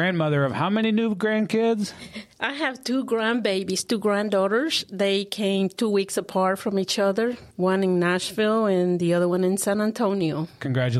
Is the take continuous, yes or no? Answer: no